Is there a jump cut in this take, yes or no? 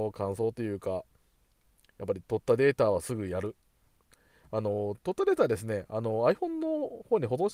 no